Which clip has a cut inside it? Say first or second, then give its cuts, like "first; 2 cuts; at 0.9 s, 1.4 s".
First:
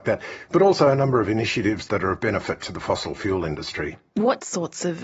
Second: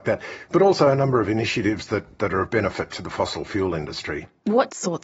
first; 1 cut; at 1.9 s